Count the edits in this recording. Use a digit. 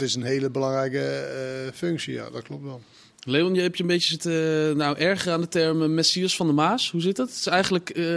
0